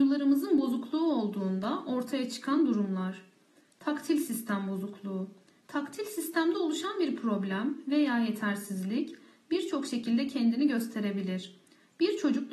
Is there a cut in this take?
no; 0 cuts

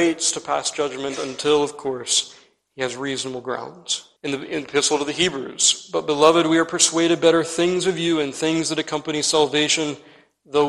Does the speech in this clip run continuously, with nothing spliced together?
no; 1 cut; at 4.2 s

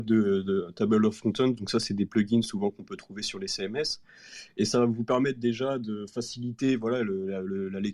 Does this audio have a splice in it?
no; 0 cuts

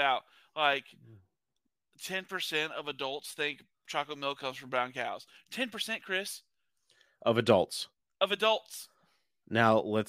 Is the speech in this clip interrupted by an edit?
no; 0 cuts

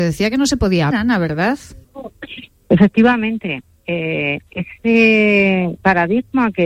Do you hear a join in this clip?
yes; 3 cuts; at 0.9 s, 1.8 s, 4.5 s

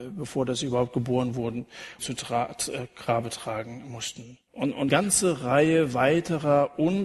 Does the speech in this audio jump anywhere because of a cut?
yes; 3 cuts; at 2.0 s, 4.5 s, 4.9 s

